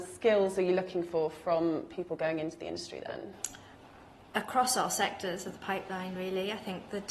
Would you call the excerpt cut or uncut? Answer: uncut